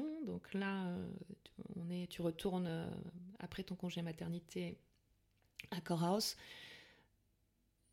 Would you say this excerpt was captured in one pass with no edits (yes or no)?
yes